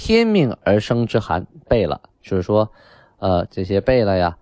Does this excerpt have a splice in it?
yes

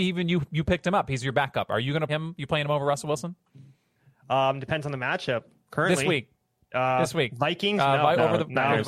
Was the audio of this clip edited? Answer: yes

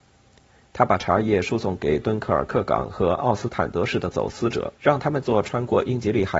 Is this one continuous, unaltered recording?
no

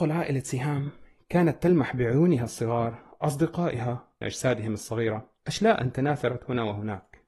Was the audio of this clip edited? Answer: yes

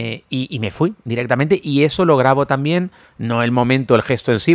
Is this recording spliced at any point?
no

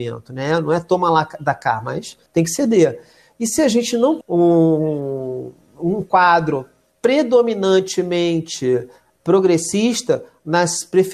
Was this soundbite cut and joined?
yes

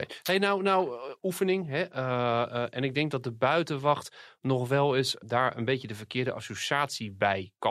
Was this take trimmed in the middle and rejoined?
no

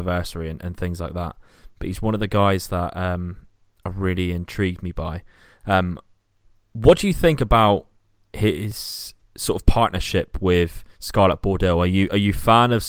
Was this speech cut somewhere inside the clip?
no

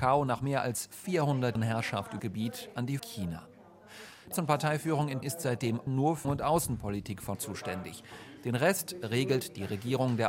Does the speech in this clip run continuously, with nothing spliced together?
no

